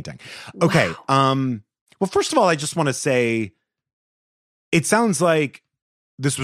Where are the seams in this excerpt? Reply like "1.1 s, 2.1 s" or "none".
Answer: 1.9 s